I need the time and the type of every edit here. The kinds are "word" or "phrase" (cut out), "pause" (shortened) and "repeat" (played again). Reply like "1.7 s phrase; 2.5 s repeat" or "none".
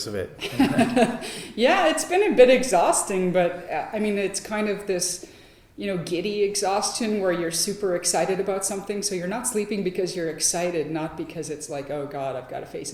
none

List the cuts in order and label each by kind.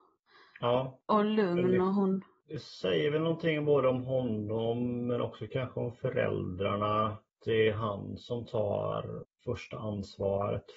none

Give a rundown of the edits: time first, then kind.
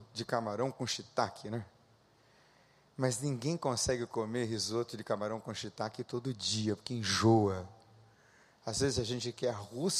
none

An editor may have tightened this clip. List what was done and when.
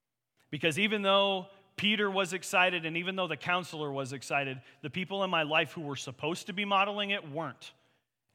none

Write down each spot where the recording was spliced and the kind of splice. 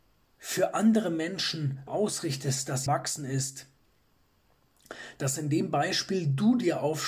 1.9 s word; 2.9 s word

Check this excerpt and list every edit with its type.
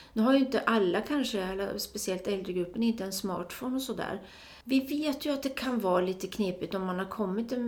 4.6 s pause

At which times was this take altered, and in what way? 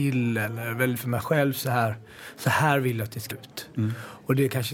1.0 s word; 3.3 s word

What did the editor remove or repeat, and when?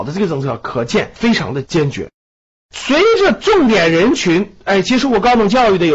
none

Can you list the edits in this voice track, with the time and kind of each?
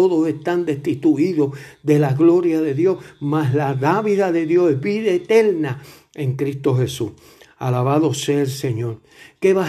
none

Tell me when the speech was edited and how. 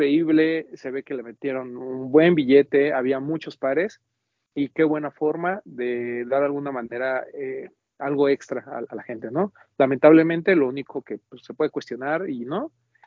none

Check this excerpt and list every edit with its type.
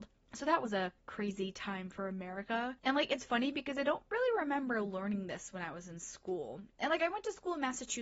2.8 s pause

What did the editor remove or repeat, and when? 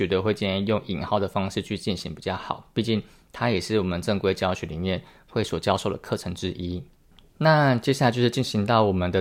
none

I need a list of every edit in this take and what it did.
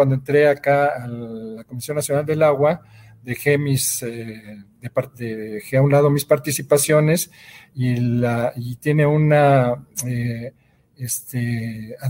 none

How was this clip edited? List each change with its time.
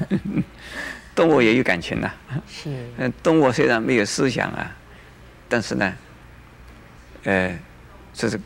none

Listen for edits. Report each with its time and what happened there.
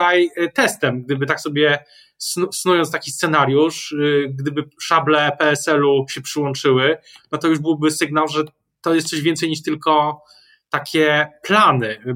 none

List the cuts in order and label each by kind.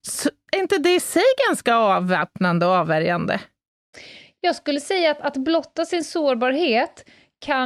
none

